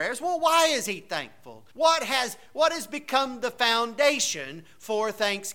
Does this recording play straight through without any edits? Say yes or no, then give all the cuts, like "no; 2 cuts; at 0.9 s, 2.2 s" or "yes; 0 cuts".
no; 1 cut; at 1.7 s